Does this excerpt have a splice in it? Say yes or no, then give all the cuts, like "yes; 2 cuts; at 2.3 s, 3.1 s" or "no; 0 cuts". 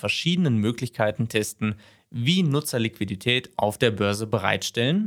no; 0 cuts